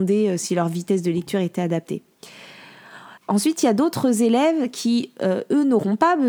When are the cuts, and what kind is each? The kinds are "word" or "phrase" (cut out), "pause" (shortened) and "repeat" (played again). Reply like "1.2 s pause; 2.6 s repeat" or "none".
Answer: 3.2 s pause